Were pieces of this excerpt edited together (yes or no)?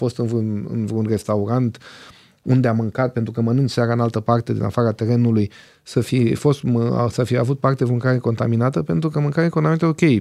no